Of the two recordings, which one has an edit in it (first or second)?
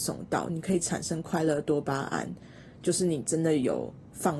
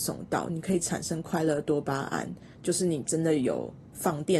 second